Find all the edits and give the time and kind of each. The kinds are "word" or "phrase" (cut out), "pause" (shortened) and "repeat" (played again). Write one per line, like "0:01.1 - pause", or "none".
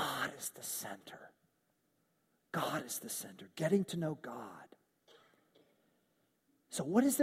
none